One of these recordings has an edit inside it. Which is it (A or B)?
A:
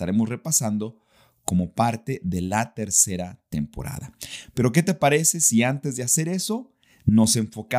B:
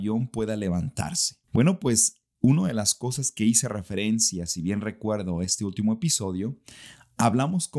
B